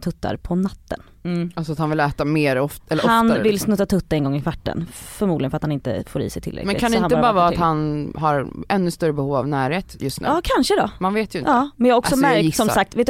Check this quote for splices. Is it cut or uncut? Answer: uncut